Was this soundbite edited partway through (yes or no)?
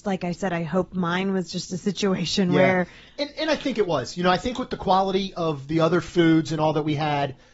no